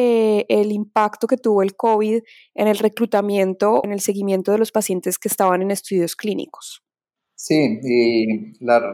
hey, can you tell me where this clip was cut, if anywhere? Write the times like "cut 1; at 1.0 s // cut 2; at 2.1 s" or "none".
cut 1; at 3.8 s